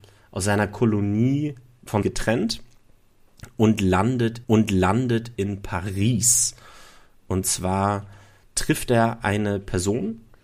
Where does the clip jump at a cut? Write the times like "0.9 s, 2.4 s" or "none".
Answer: 2.0 s, 4.4 s